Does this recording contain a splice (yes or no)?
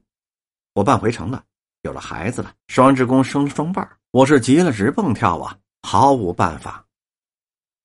yes